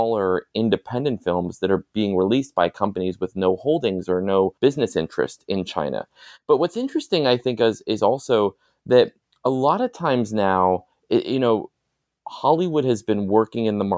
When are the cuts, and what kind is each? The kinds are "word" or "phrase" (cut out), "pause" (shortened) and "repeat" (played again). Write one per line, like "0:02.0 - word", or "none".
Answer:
0:04.6 - pause